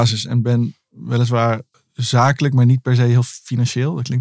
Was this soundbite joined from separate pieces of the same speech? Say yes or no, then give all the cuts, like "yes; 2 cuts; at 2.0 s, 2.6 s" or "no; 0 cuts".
yes; 1 cut; at 1.7 s